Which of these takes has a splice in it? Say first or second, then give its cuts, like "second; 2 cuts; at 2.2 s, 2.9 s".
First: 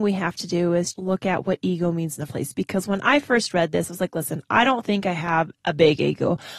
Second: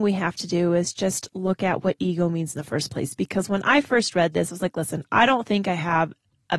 first; 3 cuts; at 0.9 s, 2.3 s, 5.6 s